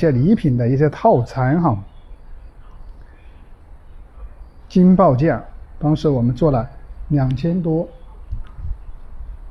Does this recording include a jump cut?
no; 0 cuts

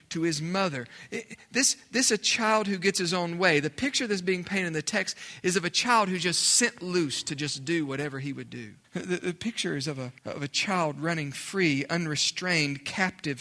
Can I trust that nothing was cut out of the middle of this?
no; 2 cuts; at 8.8 s, 10.2 s

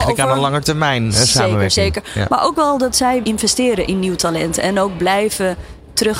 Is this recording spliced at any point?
yes; 1 cut; at 3.2 s

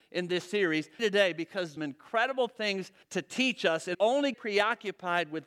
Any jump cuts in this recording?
yes; 5 cuts; at 1.0 s, 1.8 s, 3.0 s, 3.9 s, 4.3 s

